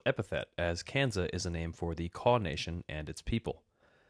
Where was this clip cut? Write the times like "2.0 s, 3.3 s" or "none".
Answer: none

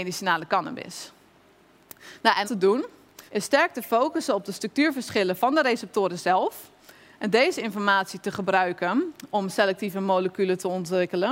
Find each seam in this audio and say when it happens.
2.4 s, 3.3 s

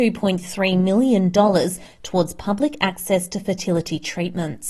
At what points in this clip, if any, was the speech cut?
none

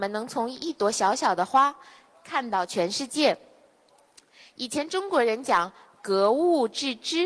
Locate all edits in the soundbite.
none

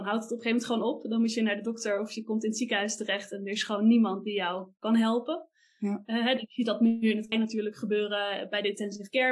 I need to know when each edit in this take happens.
7.3 s

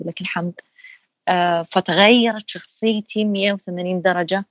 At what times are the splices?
none

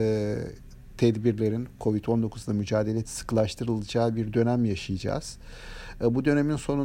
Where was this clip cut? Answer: 3.1 s

